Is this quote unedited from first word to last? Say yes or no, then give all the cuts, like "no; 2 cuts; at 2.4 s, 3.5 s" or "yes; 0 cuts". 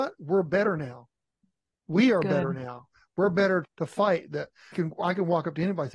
no; 2 cuts; at 3.6 s, 4.7 s